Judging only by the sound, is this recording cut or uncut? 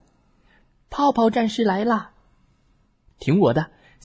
uncut